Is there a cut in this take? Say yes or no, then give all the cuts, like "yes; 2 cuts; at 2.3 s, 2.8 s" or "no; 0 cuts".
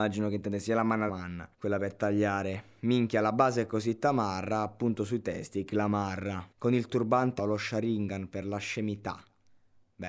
yes; 5 cuts; at 1.1 s, 1.5 s, 5.7 s, 6.5 s, 7.4 s